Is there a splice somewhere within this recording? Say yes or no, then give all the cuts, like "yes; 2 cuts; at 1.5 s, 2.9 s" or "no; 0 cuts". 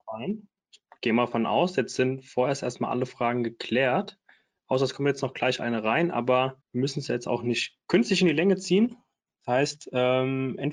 yes; 1 cut; at 6.6 s